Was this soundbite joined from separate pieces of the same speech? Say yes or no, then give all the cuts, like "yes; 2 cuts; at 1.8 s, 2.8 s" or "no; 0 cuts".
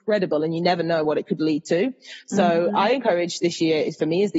no; 0 cuts